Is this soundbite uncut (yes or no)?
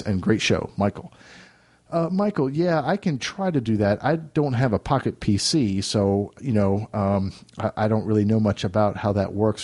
yes